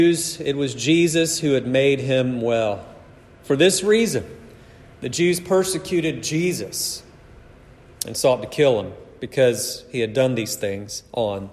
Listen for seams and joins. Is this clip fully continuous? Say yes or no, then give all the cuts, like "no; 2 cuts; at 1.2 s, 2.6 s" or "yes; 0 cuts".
yes; 0 cuts